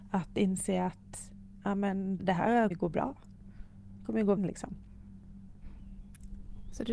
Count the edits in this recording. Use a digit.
3